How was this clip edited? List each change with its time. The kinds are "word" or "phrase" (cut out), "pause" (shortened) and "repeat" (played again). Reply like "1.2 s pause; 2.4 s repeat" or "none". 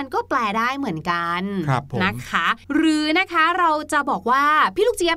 2.6 s pause